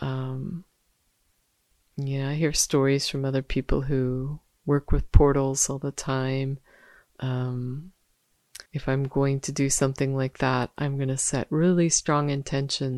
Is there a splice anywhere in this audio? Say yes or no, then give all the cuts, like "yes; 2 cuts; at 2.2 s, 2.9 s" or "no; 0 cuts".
yes; 1 cut; at 8.7 s